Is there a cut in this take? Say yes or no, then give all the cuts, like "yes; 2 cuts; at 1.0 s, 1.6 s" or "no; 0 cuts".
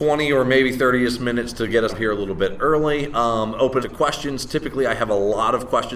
yes; 2 cuts; at 1.9 s, 3.8 s